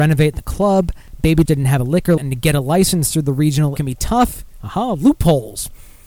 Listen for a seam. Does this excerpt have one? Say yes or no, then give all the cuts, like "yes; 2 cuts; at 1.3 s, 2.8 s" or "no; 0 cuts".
yes; 3 cuts; at 1.5 s, 2.2 s, 3.8 s